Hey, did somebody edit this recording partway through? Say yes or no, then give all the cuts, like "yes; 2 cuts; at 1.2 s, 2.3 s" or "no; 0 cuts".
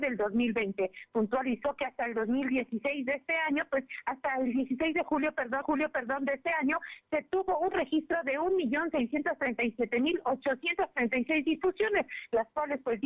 yes; 1 cut; at 5.6 s